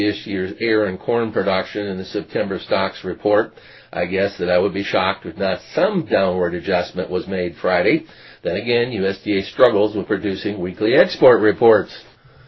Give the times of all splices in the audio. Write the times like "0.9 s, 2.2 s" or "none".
none